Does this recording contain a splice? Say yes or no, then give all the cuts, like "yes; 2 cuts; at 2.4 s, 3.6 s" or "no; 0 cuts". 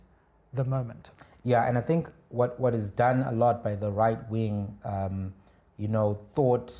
no; 0 cuts